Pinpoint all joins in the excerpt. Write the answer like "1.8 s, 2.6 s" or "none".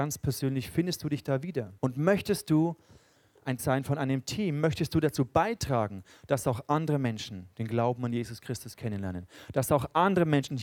1.8 s, 3.6 s